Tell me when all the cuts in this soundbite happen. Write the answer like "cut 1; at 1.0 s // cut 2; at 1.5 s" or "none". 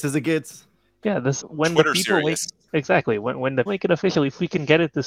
cut 1; at 1.4 s // cut 2; at 2.7 s // cut 3; at 3.7 s